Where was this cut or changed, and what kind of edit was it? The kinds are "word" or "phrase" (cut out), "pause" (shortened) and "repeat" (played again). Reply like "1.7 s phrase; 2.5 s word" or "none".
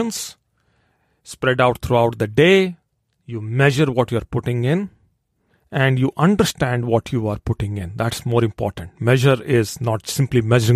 none